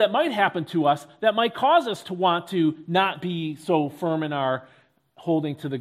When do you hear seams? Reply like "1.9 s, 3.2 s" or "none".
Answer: none